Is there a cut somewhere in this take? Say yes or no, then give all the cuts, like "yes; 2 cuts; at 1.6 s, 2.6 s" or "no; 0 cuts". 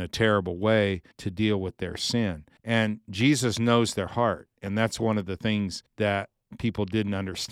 yes; 3 cuts; at 1.1 s, 2.6 s, 5.9 s